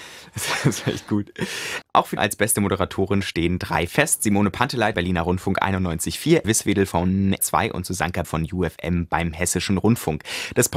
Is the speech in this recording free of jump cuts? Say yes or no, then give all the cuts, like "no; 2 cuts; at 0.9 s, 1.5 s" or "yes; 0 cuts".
no; 6 cuts; at 2.2 s, 3.9 s, 4.9 s, 6.4 s, 7.4 s, 8.2 s